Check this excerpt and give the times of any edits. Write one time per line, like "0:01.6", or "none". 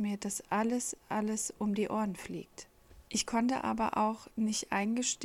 0:03.1